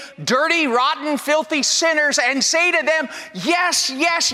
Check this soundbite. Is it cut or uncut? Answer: uncut